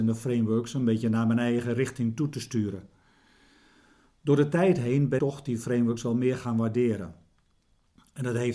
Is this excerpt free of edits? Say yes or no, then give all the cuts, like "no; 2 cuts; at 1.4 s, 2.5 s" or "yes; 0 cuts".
no; 1 cut; at 5.2 s